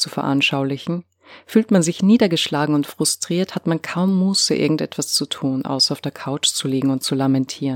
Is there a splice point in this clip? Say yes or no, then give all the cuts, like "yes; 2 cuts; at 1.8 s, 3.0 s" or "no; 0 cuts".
no; 0 cuts